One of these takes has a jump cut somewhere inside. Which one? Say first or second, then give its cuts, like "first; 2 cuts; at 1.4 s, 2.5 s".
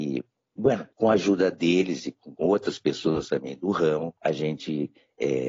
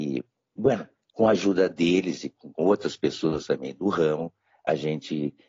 first; 2 cuts; at 0.9 s, 4.2 s